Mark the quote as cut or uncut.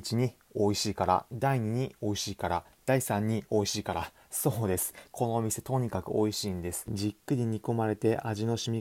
uncut